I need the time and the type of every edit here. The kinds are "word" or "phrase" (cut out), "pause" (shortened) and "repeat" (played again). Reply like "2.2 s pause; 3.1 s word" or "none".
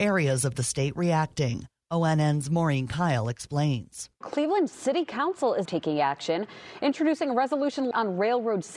5.6 s word